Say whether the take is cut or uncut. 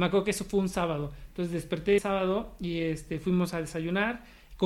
cut